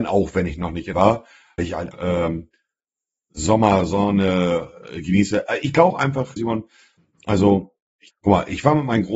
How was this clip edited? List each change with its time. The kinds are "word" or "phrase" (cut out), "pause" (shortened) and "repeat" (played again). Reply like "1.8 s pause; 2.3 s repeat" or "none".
0.9 s word; 1.6 s word; 1.9 s word; 5.9 s word; 6.4 s word; 8.1 s word